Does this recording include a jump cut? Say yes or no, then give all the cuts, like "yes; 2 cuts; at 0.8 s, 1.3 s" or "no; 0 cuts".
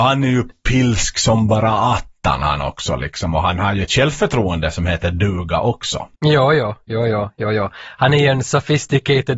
yes; 1 cut; at 6.2 s